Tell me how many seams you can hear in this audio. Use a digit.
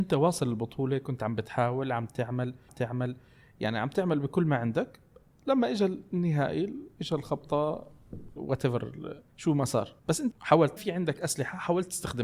6